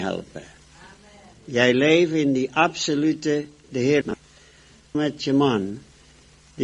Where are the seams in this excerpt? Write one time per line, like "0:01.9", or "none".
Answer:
0:03.7
0:04.0
0:04.9